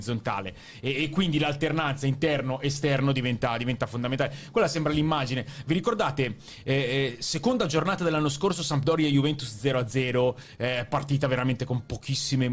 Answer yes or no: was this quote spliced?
no